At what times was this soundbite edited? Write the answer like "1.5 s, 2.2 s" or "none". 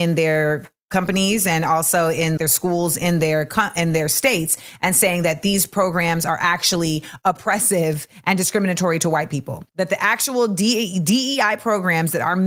2.4 s, 9.7 s